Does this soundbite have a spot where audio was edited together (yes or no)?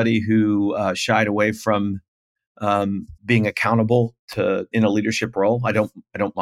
yes